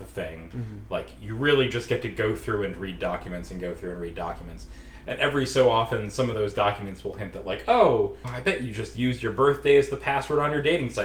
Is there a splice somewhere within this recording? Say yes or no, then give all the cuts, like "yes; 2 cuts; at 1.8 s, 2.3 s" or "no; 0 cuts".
no; 0 cuts